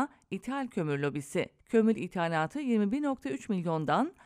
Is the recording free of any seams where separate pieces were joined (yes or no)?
no